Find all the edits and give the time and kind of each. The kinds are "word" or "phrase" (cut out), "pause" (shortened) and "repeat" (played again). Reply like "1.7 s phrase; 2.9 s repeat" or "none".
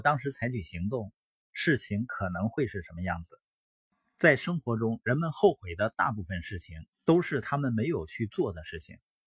6.9 s pause

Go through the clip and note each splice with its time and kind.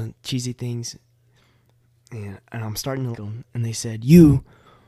3.1 s word

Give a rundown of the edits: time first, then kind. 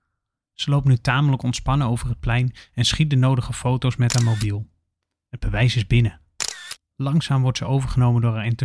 none

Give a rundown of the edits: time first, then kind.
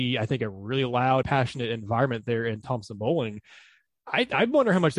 1.2 s phrase

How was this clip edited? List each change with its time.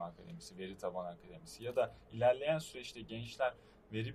none

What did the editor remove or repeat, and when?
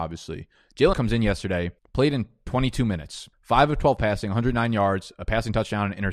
0.9 s word; 1.8 s pause; 3.3 s pause

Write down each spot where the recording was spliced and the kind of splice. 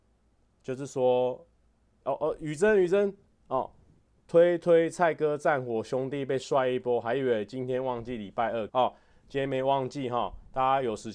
2.0 s word; 8.7 s word

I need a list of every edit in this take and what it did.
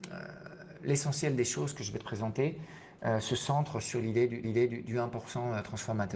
4.4 s repeat

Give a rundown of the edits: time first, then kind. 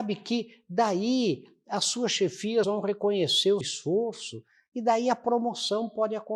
2.6 s word; 3.6 s word

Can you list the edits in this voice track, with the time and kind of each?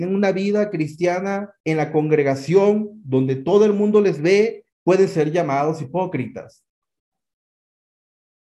1.6 s pause; 4.7 s pause

